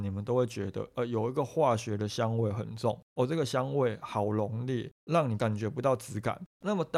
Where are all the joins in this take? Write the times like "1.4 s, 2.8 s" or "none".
none